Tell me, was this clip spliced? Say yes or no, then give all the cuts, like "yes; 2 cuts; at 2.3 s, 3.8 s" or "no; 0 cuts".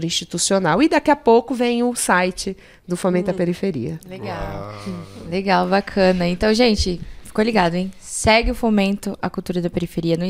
no; 0 cuts